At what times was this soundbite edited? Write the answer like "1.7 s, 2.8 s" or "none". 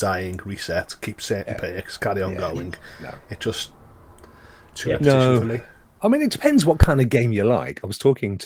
none